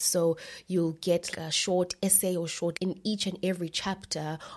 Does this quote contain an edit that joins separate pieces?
yes; 2 cuts; at 1.3 s, 2.7 s

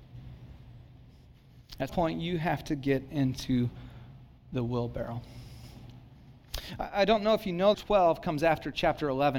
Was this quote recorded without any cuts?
no; 2 cuts; at 1.9 s, 7.7 s

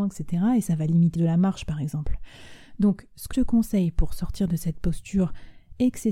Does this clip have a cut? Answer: yes; 2 cuts; at 1.2 s, 3.3 s

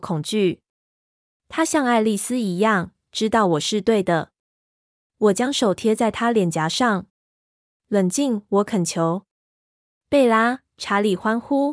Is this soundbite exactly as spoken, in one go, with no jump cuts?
yes; 0 cuts

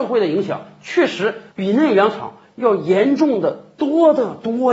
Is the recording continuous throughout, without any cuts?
no; 1 cut; at 1.5 s

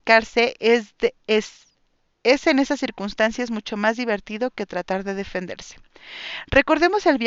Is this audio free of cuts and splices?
yes; 0 cuts

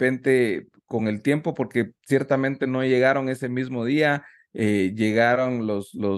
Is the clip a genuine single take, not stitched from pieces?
yes; 0 cuts

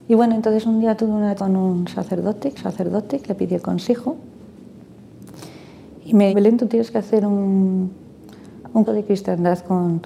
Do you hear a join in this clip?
yes; 4 cuts; at 1.4 s, 2.6 s, 6.3 s, 8.9 s

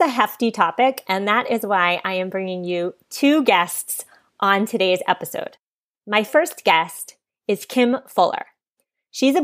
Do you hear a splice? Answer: no; 0 cuts

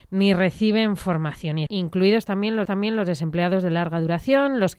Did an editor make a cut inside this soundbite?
yes; 2 cuts; at 1.7 s, 2.7 s

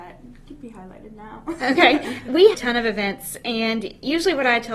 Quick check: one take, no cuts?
no; 1 cut; at 2.5 s

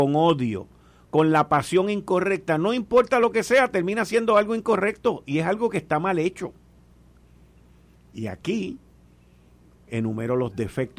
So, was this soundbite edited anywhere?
no; 0 cuts

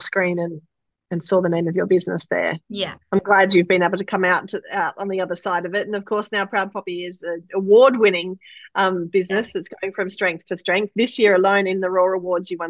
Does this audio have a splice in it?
yes; 1 cut; at 2.6 s

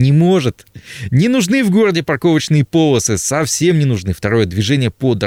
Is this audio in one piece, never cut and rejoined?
yes; 0 cuts

